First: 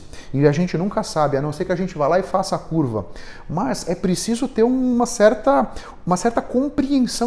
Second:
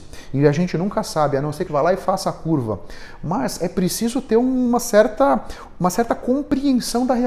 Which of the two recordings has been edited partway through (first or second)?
second